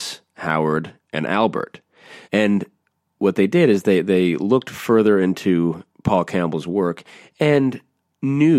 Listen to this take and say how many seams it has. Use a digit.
1